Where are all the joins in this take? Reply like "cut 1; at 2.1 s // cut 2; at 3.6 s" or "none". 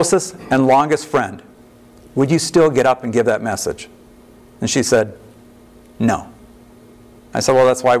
none